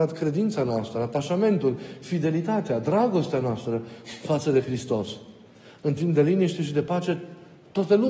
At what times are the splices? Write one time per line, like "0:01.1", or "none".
none